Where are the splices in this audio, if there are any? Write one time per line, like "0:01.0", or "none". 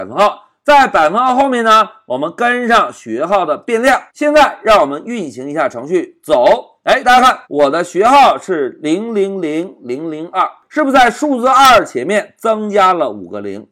0:04.1
0:07.4